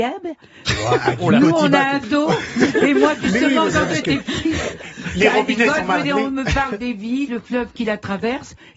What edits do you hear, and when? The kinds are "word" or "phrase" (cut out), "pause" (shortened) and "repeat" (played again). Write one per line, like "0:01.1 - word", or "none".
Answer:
0:02.0 - word
0:06.0 - word
0:07.3 - word